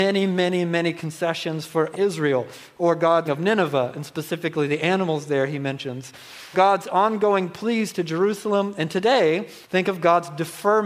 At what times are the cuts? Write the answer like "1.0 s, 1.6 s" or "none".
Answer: 1.9 s, 3.2 s, 6.5 s, 9.6 s